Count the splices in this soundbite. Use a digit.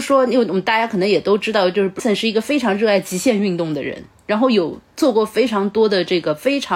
1